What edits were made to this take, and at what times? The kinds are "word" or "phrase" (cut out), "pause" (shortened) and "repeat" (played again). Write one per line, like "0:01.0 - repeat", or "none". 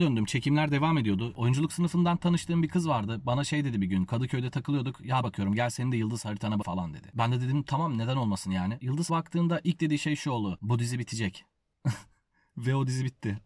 0:05.2 - phrase
0:06.6 - word
0:09.1 - word